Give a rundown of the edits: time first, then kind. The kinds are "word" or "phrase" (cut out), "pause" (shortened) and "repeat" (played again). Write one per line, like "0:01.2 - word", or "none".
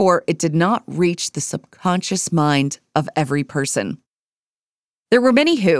none